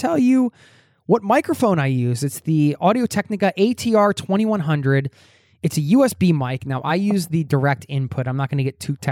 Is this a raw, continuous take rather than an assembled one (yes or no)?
yes